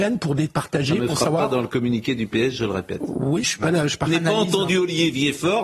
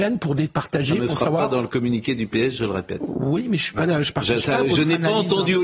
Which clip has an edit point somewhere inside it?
first; 2 cuts; at 3.4 s, 4.1 s

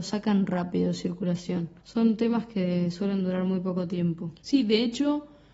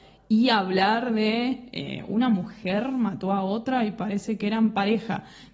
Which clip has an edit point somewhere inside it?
first; 2 cuts; at 1.8 s, 4.4 s

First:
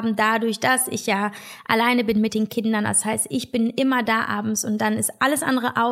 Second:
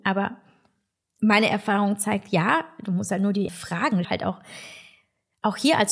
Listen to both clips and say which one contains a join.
second; 2 cuts; at 3.5 s, 4.0 s

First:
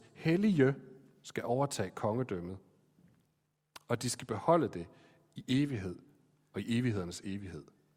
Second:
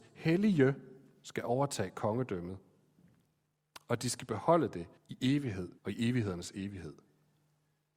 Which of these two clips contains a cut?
second; 2 cuts; at 5.0 s, 5.8 s

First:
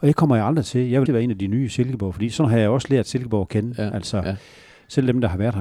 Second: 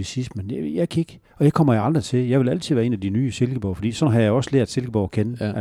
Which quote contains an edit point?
first; 1 cut; at 1.1 s

